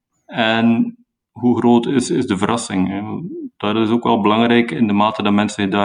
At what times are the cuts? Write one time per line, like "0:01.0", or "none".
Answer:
none